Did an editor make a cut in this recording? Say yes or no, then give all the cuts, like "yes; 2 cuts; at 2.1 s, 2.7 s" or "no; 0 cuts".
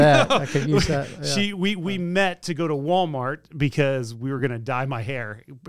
no; 0 cuts